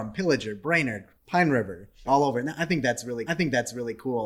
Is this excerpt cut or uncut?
cut